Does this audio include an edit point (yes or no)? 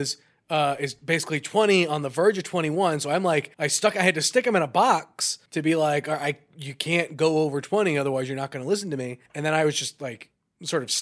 yes